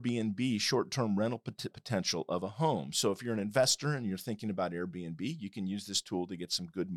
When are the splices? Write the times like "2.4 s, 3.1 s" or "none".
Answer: 1.7 s